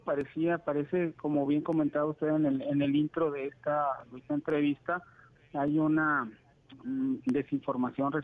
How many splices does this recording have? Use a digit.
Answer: 0